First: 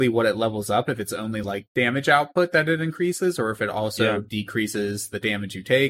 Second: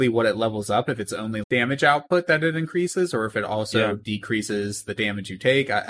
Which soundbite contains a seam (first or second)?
second